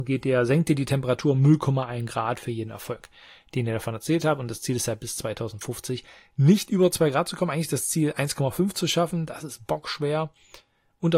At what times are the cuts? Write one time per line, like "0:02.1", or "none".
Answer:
none